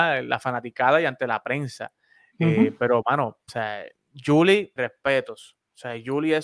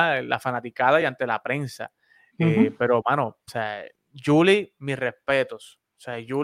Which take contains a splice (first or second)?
first